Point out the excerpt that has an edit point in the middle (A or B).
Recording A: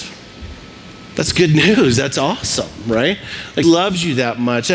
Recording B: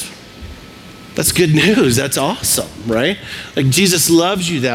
A